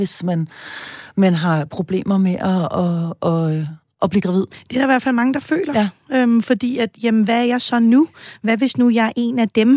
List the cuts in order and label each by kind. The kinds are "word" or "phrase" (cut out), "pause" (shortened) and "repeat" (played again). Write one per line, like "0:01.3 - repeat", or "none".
none